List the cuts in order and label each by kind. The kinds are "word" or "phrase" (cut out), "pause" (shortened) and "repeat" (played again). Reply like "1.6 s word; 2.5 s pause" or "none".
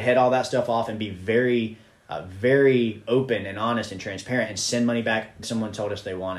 5.4 s word